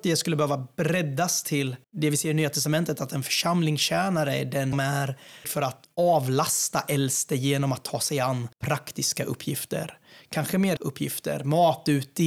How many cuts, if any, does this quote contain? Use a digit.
6